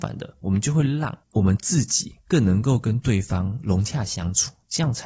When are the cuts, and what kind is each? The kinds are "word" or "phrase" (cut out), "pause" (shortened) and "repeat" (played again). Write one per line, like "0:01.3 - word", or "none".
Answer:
0:01.2 - pause